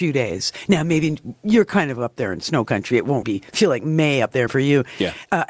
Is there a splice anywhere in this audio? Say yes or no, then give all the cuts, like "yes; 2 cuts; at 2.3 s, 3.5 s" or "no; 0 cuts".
yes; 2 cuts; at 3.2 s, 4.5 s